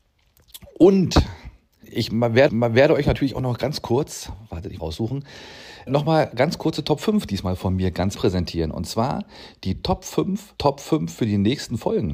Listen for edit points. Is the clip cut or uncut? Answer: cut